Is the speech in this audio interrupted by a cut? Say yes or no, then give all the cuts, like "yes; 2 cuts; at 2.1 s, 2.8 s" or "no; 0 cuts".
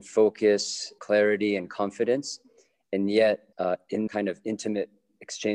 yes; 3 cuts; at 1.0 s, 3.5 s, 4.1 s